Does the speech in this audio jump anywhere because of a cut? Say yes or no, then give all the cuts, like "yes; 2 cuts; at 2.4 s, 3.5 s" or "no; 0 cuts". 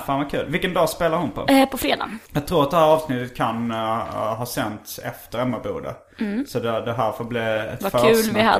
yes; 1 cut; at 2.3 s